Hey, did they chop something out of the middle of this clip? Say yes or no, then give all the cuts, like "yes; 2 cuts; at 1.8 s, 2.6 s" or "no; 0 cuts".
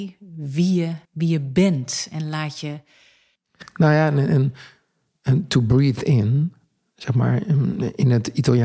yes; 1 cut; at 1.0 s